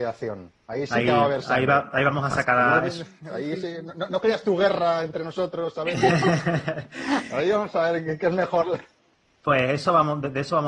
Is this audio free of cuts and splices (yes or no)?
yes